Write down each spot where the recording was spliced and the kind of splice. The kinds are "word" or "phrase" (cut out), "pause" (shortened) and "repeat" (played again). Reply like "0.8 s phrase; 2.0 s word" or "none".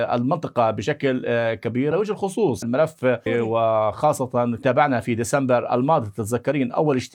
1.9 s word; 2.6 s word; 3.3 s word; 4.6 s word